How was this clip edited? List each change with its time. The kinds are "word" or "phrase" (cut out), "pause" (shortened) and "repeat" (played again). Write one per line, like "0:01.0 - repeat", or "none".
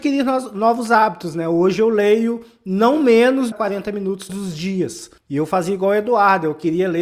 0:03.5 - phrase
0:04.3 - word
0:05.2 - pause